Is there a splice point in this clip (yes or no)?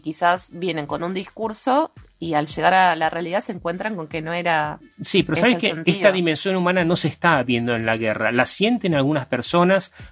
no